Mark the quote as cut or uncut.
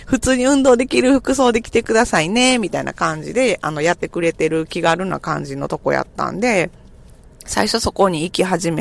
uncut